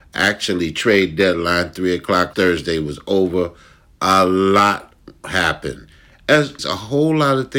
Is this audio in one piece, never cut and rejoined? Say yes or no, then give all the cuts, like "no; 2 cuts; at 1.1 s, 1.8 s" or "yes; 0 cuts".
no; 2 cuts; at 2.3 s, 6.6 s